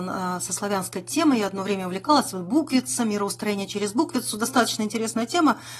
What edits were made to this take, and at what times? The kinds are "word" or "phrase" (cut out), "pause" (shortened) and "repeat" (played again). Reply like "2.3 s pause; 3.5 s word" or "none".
none

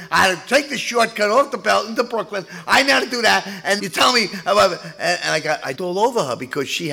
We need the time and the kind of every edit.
3.8 s word; 5.7 s word

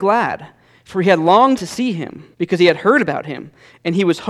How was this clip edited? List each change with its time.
1.6 s word; 2.3 s pause

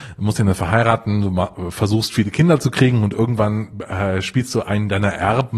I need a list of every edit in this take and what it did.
none

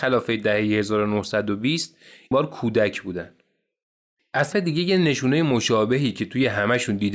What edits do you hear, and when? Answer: 2.3 s word; 4.5 s word

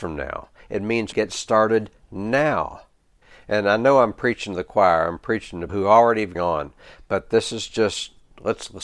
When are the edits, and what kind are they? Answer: 1.1 s word; 3.2 s pause; 5.7 s word; 6.3 s phrase

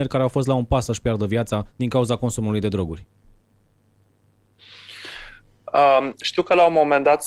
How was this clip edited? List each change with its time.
1.7 s pause

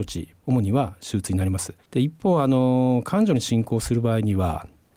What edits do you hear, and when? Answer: 1.8 s pause

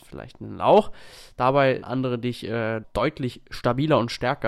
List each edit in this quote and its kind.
1.8 s word; 2.8 s word

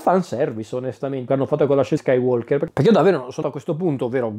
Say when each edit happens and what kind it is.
1.3 s word; 2.0 s word; 3.4 s word

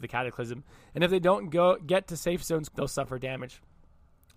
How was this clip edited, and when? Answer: 2.7 s word

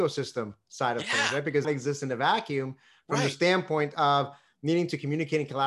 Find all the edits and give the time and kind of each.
1.6 s phrase

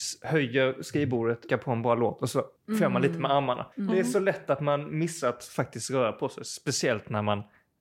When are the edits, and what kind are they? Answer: 1.5 s word; 2.6 s pause; 3.7 s pause

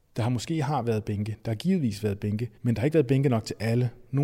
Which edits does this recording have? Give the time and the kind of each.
2.6 s pause

